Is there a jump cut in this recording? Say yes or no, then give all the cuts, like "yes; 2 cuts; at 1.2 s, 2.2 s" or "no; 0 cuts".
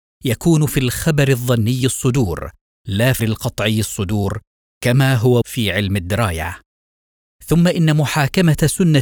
yes; 2 cuts; at 3.2 s, 5.4 s